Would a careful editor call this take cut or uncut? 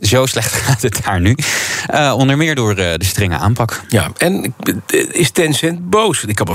uncut